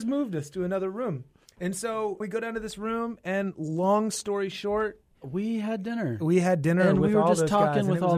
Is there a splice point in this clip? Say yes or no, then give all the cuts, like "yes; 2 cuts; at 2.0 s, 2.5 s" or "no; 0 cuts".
yes; 3 cuts; at 1.5 s, 2.2 s, 5.1 s